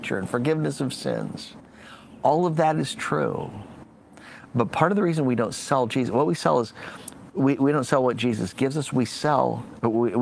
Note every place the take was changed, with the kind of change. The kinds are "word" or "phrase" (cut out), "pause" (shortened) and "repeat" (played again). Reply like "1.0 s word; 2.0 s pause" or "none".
none